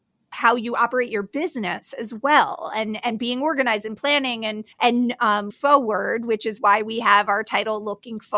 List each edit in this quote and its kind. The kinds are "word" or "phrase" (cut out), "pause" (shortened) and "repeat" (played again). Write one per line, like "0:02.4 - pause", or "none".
0:04.7 - pause
0:05.5 - word